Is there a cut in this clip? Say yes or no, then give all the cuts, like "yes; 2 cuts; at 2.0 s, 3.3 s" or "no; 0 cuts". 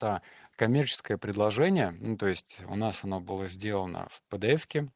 no; 0 cuts